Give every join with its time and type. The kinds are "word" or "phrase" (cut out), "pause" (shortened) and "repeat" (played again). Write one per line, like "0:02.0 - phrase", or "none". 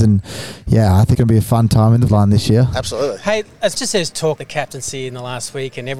0:01.1 - word
0:02.1 - word
0:03.7 - word
0:04.4 - word